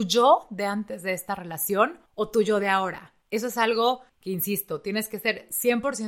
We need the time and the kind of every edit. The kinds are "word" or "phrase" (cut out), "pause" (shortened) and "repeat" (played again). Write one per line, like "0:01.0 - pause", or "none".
0:02.1 - pause
0:03.2 - pause
0:04.1 - pause